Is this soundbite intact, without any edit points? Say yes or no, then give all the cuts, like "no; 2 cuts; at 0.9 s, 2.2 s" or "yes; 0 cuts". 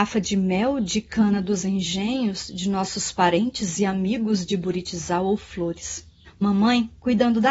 no; 1 cut; at 6.3 s